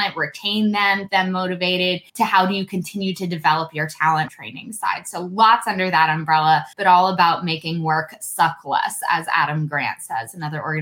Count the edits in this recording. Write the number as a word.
four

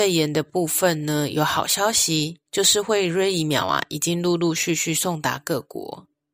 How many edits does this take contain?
one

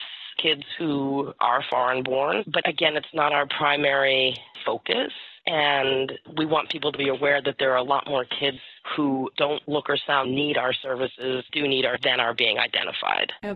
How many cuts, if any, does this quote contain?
three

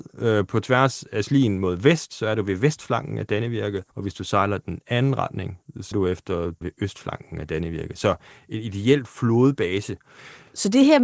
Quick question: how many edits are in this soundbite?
three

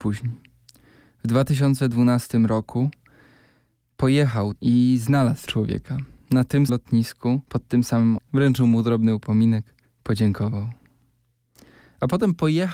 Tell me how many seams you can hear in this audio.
six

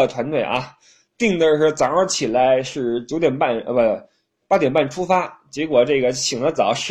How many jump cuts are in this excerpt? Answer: zero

